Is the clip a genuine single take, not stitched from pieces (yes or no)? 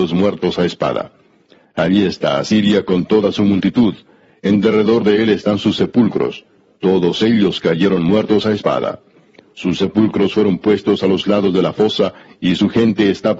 yes